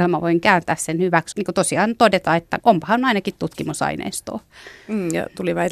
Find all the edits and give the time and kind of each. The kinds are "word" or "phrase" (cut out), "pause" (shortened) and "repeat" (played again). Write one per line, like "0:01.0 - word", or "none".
0:01.3 - phrase
0:02.6 - word